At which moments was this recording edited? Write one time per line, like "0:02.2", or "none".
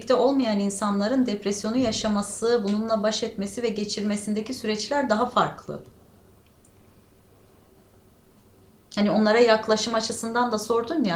none

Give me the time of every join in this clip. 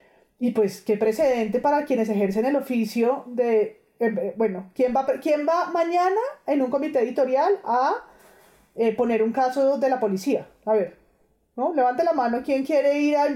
none

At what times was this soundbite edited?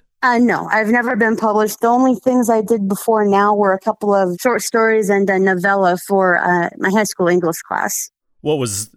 none

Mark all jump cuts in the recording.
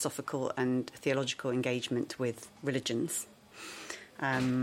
0:02.6

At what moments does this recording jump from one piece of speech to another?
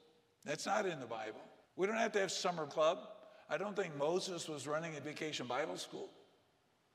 0:01.6
0:02.7
0:05.0

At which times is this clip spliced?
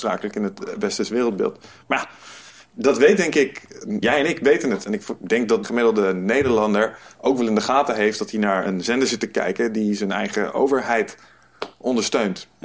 0:04.0
0:05.6

